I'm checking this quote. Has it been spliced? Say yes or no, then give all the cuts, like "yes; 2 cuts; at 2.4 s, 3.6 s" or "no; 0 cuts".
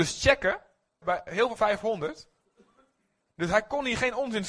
yes; 2 cuts; at 1.0 s, 1.6 s